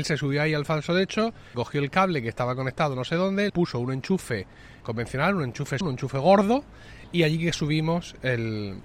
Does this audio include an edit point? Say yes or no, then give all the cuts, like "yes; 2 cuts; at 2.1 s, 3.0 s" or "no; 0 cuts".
yes; 4 cuts; at 1.5 s, 3.5 s, 4.8 s, 5.8 s